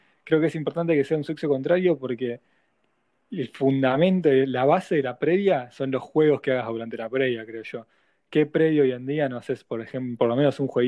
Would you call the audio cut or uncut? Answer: uncut